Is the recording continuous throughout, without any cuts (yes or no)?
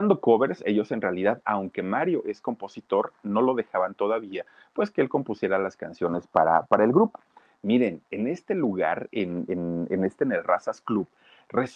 yes